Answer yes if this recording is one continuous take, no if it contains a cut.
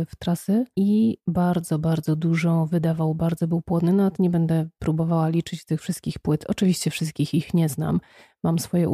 yes